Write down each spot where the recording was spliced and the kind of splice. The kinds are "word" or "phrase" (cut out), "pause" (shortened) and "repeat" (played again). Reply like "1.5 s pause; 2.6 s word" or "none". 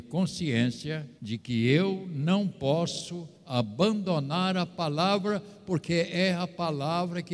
1.2 s pause; 3.3 s pause

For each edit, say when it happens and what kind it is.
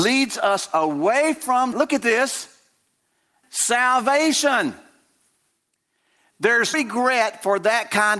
1.7 s word; 3.4 s phrase; 6.7 s word

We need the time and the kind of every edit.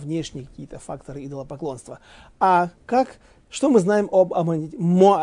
2.8 s pause

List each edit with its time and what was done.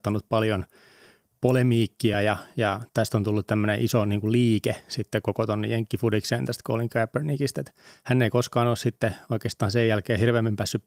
none

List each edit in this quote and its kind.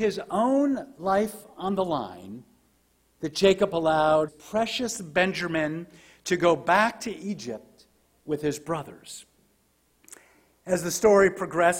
4.3 s word

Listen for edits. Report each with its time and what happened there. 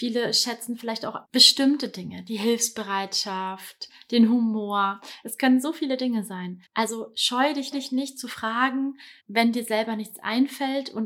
1.2 s pause; 6.7 s pause; 7.7 s repeat; 9.2 s pause

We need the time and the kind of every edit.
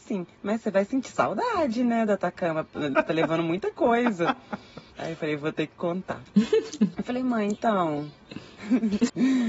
2.9 s phrase

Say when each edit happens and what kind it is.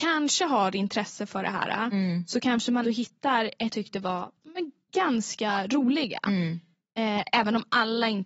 2.8 s word; 3.7 s phrase

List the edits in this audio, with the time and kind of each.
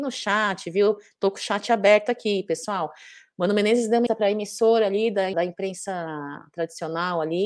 4.1 s word; 5.3 s word

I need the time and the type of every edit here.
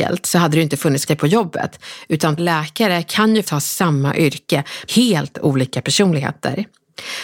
1.1 s word; 2.4 s word; 3.4 s word; 4.9 s word

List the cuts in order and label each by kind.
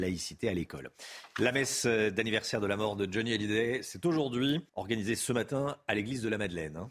4.7 s pause

